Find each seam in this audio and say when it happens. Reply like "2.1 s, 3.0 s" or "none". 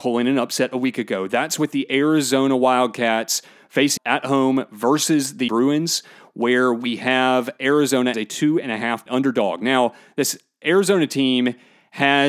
4.0 s, 5.5 s, 8.1 s, 9.1 s